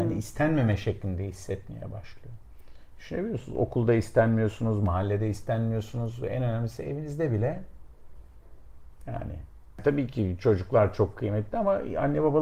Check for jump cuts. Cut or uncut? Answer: uncut